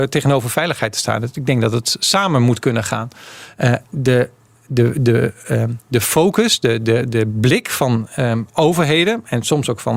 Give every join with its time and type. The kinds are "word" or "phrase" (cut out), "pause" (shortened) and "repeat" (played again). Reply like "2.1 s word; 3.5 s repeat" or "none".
none